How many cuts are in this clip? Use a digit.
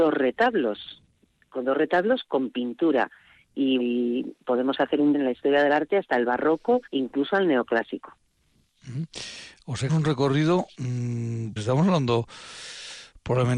5